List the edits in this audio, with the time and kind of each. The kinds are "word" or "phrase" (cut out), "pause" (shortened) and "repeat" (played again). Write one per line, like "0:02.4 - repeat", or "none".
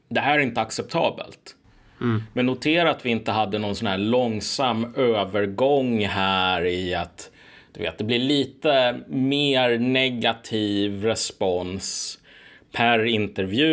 none